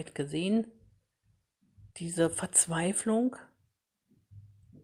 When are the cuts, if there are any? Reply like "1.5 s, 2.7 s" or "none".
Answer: 1.9 s

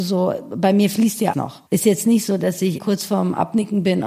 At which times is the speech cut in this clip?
1.3 s, 1.7 s, 2.8 s

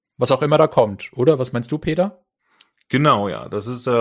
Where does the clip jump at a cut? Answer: none

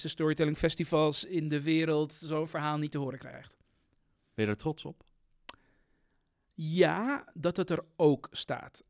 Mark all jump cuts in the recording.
none

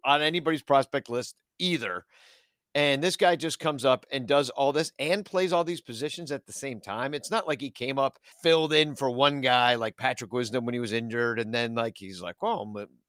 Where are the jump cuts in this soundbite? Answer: 8.3 s

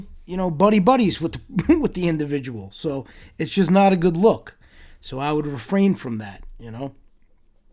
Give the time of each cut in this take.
none

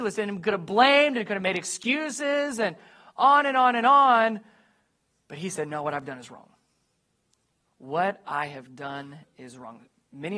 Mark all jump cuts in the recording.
none

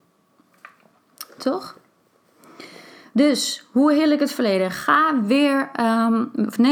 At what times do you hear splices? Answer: none

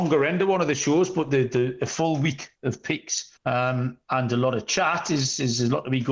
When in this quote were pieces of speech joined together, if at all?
3.4 s

